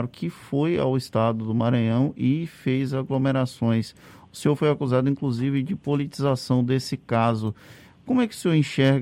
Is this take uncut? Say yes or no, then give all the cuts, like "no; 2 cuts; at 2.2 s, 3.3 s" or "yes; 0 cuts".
yes; 0 cuts